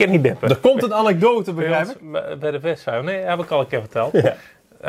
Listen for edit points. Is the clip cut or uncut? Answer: uncut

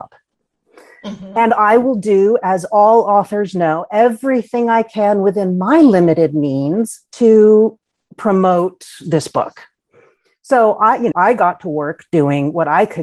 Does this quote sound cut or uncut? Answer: cut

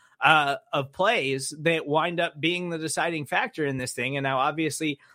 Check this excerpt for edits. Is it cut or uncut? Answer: uncut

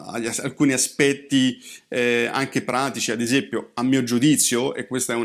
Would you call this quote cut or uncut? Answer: uncut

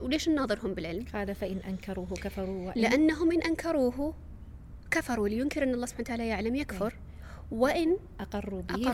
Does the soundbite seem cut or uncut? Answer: uncut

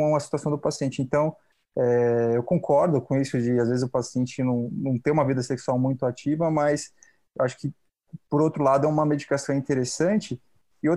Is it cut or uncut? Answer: uncut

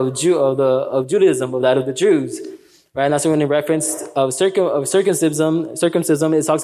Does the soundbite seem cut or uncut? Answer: uncut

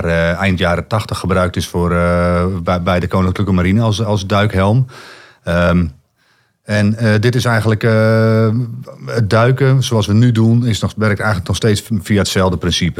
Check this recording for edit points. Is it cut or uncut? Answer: uncut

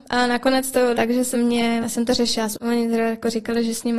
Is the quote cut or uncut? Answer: cut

